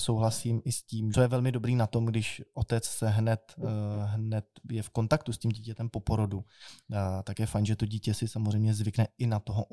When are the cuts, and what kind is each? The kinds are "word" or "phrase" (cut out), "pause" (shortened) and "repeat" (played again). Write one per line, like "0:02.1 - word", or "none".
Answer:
0:01.1 - phrase

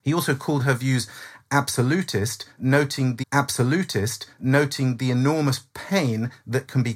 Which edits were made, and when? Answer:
0:03.2 - repeat

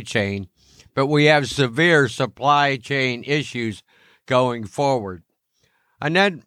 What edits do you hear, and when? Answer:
none

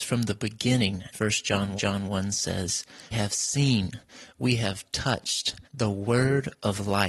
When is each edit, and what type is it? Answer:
0:01.1 - word
0:01.8 - repeat
0:03.1 - word
0:04.4 - phrase
0:05.6 - pause

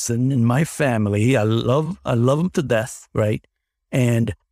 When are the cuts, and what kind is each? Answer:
none

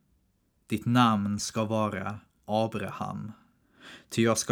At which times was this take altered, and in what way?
none

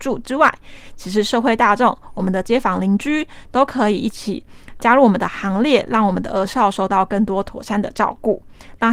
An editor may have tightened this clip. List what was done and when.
0:04.8 - word

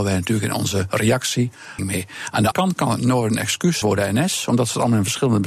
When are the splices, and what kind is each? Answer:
0:01.8 - word
0:02.5 - word
0:03.8 - word

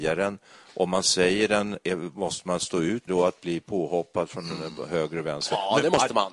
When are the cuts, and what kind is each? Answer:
0:03.1 - word

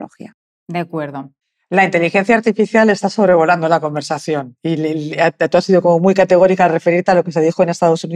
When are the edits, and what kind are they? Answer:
0:01.4 - pause

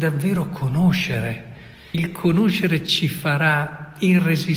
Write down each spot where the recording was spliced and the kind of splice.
0:01.9 - word

